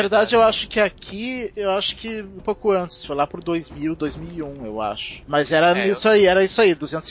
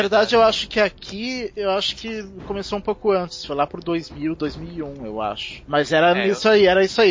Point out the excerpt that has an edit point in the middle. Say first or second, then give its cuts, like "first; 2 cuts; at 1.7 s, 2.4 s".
first; 1 cut; at 2.4 s